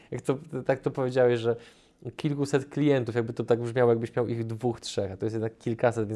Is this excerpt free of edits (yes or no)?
yes